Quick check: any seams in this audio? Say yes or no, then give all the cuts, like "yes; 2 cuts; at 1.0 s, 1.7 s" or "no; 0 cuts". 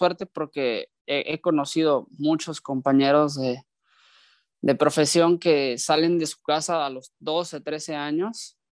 no; 0 cuts